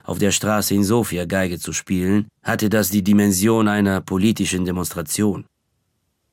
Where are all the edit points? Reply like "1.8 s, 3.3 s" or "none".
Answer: 2.4 s